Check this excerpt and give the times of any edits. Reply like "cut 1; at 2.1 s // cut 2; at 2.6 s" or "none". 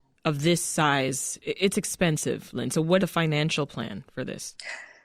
cut 1; at 3.0 s

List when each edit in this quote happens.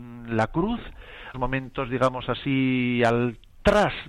cut 1; at 1.3 s

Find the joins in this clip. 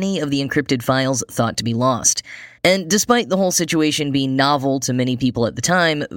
cut 1; at 2.6 s

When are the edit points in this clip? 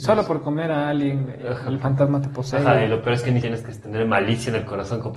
cut 1; at 3.4 s

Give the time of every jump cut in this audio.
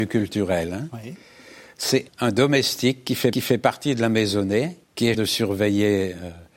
cut 1; at 2.1 s // cut 2; at 3.3 s // cut 3; at 4.8 s // cut 4; at 5.1 s

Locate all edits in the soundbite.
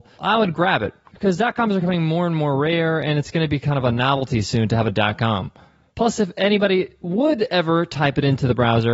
none

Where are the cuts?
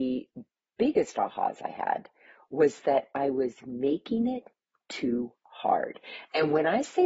none

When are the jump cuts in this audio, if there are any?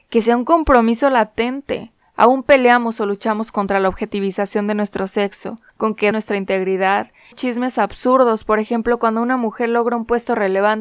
cut 1; at 5.7 s // cut 2; at 6.1 s // cut 3; at 7.3 s

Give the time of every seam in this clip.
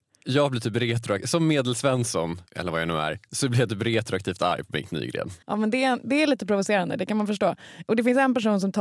cut 1; at 2.5 s // cut 2; at 5.4 s

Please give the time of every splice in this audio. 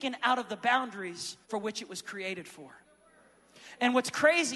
cut 1; at 1.4 s

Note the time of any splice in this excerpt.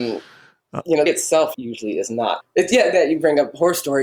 cut 1; at 1.1 s // cut 2; at 1.5 s // cut 3; at 2.4 s // cut 4; at 2.9 s

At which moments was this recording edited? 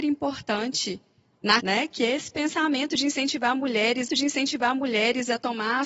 cut 1; at 1.6 s // cut 2; at 4.1 s

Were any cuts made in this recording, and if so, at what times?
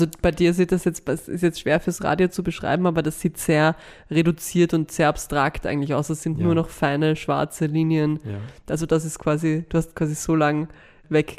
none

